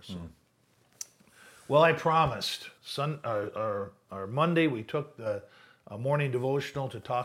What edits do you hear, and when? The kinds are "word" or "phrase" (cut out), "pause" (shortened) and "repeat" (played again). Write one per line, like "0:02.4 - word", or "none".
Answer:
0:02.8 - pause